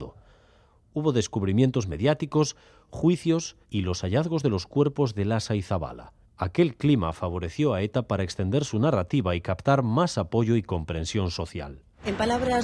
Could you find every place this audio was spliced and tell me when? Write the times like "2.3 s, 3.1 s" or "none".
3.6 s, 6.2 s